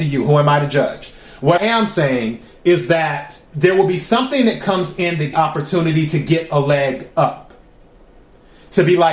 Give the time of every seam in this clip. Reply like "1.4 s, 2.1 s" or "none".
1.6 s, 3.5 s, 5.3 s